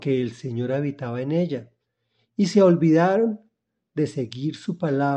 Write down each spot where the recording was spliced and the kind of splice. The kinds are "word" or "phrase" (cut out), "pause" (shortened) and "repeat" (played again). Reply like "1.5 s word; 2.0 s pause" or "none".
none